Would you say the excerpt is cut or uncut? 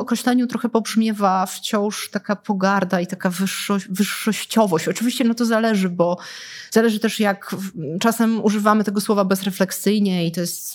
uncut